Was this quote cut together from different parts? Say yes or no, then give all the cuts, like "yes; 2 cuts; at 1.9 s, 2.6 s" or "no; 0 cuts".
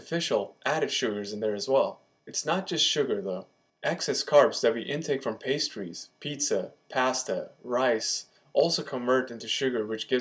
no; 0 cuts